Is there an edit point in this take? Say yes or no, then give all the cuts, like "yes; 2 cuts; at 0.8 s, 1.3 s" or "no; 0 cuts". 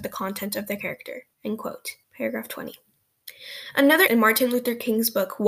yes; 3 cuts; at 1.3 s, 2.0 s, 4.1 s